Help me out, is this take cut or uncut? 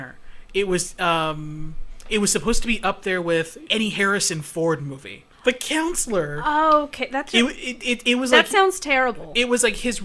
cut